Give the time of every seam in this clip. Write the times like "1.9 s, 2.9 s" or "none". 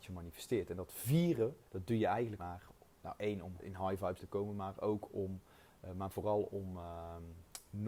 1.7 s, 2.4 s, 2.9 s, 3.6 s, 4.2 s